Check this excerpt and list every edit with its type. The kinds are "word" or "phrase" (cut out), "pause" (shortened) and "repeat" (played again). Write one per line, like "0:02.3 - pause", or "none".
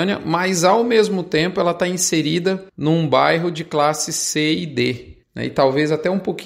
0:02.7 - pause
0:05.2 - pause